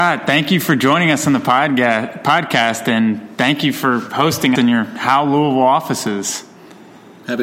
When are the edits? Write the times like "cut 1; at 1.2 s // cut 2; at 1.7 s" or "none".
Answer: cut 1; at 4.6 s